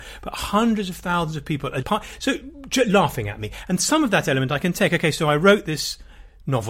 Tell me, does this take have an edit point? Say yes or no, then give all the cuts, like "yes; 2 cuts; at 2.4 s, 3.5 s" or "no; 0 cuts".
yes; 1 cut; at 1.8 s